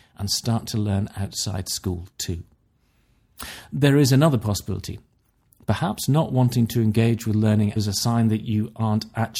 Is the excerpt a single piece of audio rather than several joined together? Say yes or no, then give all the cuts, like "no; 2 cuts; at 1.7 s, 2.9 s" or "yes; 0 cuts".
no; 1 cut; at 7.8 s